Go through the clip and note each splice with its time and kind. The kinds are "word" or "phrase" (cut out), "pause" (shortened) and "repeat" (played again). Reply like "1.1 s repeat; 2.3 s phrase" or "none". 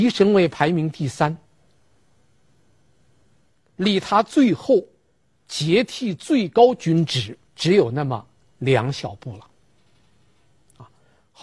7.5 s pause